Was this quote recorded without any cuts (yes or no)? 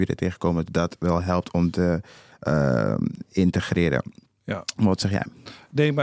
yes